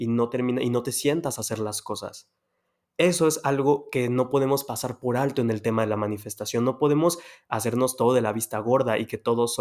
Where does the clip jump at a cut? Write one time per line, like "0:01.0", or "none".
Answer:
none